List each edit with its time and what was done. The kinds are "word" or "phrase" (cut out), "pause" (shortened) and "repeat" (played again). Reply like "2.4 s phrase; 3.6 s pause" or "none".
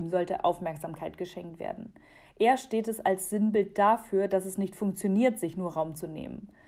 none